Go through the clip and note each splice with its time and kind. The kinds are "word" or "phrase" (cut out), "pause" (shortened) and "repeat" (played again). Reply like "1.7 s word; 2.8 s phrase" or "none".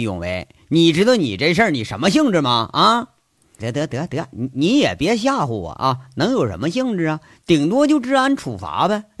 3.6 s word